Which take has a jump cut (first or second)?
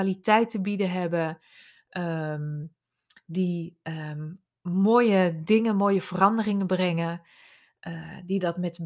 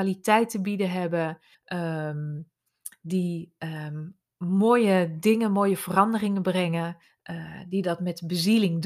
second